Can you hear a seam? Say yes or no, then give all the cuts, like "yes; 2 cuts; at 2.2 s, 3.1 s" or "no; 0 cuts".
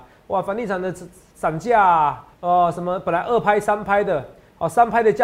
yes; 1 cut; at 2.3 s